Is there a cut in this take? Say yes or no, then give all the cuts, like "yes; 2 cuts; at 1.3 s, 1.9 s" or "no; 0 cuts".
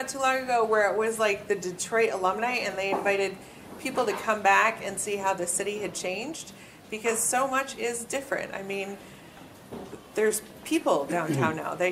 no; 0 cuts